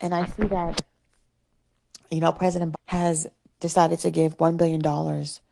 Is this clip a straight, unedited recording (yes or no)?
no